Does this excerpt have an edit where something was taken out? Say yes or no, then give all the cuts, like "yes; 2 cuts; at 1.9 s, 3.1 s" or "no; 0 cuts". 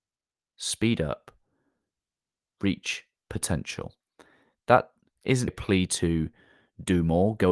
yes; 2 cuts; at 3.2 s, 5.5 s